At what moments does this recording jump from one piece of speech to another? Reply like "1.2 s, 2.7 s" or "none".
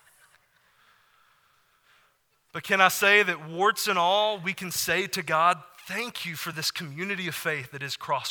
none